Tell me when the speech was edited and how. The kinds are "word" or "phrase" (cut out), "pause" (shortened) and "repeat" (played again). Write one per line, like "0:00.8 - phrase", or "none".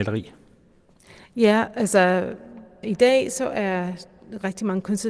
none